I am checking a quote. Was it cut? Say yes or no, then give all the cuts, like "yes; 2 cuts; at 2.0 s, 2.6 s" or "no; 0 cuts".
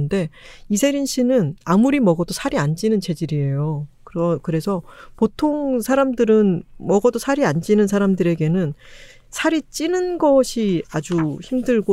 no; 0 cuts